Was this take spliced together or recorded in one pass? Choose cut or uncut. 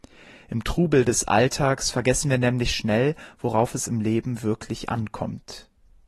uncut